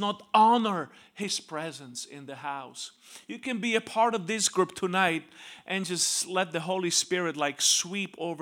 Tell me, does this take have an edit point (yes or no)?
no